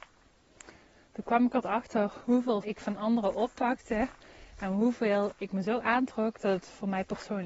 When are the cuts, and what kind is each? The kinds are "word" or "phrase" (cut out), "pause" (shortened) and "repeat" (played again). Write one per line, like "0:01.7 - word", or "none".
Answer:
0:01.6 - word
0:02.6 - word